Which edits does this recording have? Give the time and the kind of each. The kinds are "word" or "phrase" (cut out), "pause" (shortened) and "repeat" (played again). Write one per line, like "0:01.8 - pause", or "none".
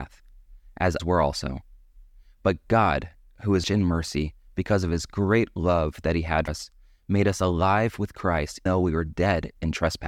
0:01.0 - word
0:03.6 - word
0:06.5 - word
0:08.7 - word